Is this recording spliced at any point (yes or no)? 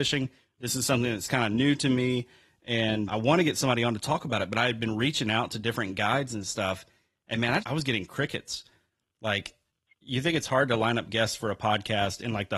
yes